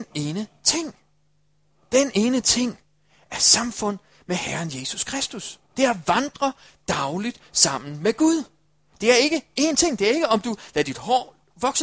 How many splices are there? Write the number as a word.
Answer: one